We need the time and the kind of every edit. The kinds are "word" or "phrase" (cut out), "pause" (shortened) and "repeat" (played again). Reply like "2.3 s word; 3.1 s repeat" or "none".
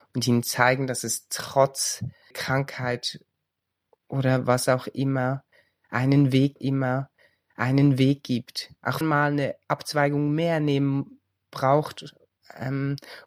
2.3 s word; 6.6 s repeat; 9.0 s phrase